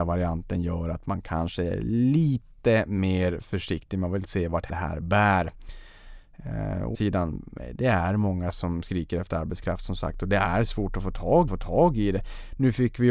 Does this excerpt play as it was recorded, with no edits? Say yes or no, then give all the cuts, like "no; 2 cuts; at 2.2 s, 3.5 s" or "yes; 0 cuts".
no; 4 cuts; at 4.7 s, 6.9 s, 8.5 s, 11.5 s